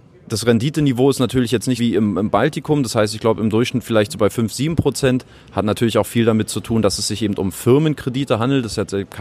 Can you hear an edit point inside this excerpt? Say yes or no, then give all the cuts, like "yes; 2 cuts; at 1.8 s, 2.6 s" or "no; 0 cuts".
yes; 1 cut; at 1.8 s